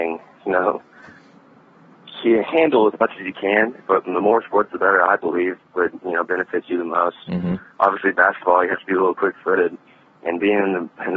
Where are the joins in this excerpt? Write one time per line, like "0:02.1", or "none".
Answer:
none

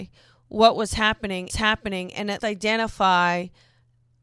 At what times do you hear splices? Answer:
0:01.5
0:02.4

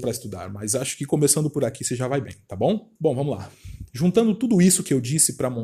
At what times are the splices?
0:03.0

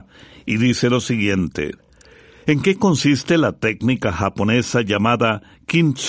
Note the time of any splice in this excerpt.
none

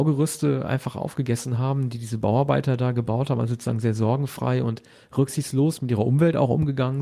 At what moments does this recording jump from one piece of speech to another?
none

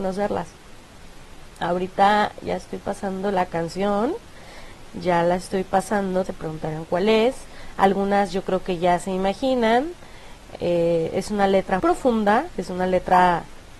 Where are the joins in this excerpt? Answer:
0:06.3
0:11.8

